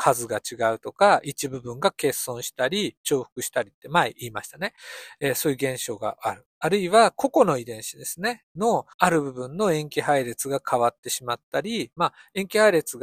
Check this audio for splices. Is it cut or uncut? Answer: cut